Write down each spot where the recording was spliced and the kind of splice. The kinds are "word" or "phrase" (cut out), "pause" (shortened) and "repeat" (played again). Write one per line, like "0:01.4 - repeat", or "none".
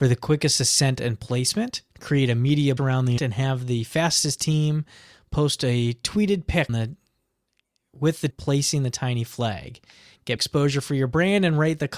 0:01.9 - pause
0:02.8 - word
0:03.2 - word
0:06.7 - word
0:08.3 - word
0:10.4 - word